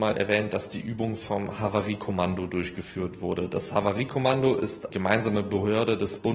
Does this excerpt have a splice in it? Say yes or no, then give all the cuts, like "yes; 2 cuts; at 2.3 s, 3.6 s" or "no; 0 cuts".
yes; 1 cut; at 4.9 s